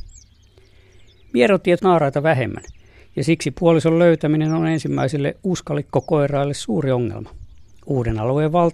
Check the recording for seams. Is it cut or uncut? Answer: cut